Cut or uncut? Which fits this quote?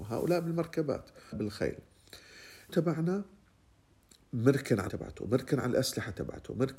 cut